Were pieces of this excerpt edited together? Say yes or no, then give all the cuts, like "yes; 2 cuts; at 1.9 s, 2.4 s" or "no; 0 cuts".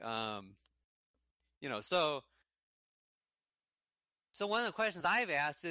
no; 0 cuts